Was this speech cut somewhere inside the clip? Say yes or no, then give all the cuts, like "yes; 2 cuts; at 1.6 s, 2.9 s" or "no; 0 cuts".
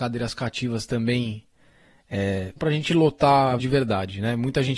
yes; 2 cuts; at 2.6 s, 3.6 s